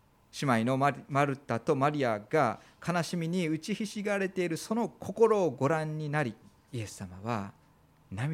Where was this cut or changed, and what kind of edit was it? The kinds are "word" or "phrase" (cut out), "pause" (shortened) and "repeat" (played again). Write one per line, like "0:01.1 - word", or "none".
0:06.5 - pause